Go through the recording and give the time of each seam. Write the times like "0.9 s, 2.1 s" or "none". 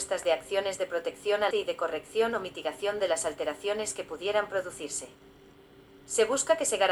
1.5 s